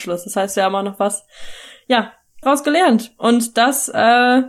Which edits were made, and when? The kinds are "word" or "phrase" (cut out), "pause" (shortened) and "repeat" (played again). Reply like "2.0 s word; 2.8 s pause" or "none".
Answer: 2.4 s phrase